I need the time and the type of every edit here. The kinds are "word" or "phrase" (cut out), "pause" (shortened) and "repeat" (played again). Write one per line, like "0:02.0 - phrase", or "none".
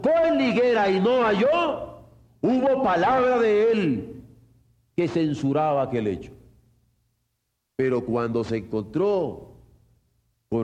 none